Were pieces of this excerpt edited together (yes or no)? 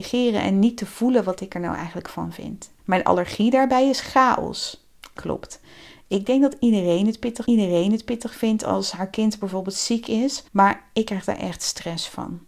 yes